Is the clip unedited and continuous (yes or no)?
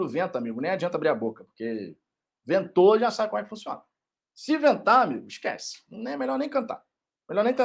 yes